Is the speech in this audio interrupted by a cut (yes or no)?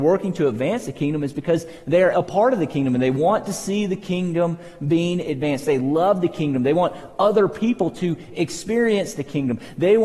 yes